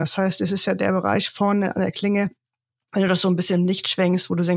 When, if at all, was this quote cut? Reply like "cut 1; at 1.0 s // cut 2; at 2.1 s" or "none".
none

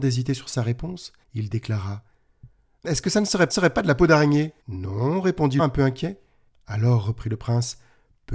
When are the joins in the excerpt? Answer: cut 1; at 1.2 s // cut 2; at 2.8 s // cut 3; at 3.5 s // cut 4; at 4.6 s // cut 5; at 5.6 s // cut 6; at 6.5 s

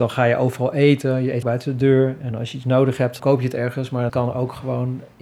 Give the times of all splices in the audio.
cut 1; at 1.4 s // cut 2; at 3.2 s // cut 3; at 4.1 s

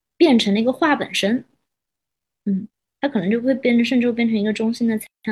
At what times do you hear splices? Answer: none

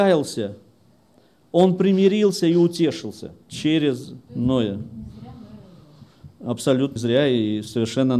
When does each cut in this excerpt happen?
cut 1; at 3.4 s // cut 2; at 7.0 s

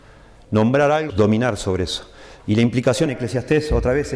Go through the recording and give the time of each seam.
cut 1; at 1.1 s // cut 2; at 3.1 s

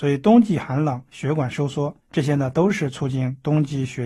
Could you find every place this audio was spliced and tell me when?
cut 1; at 2.0 s

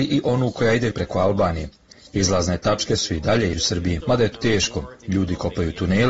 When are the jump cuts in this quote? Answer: cut 1; at 0.9 s // cut 2; at 3.5 s // cut 3; at 4.0 s // cut 4; at 4.3 s

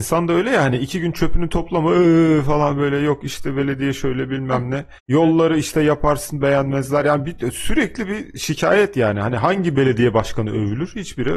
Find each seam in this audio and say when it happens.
cut 1; at 5.0 s

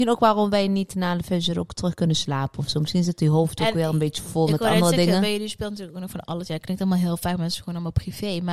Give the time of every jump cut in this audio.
none

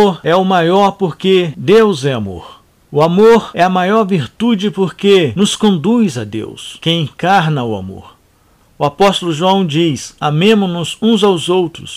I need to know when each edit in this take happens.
cut 1; at 10.2 s

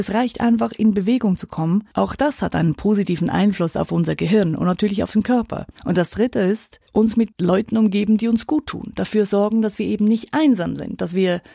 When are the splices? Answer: cut 1; at 1.9 s // cut 2; at 5.8 s // cut 3; at 6.9 s

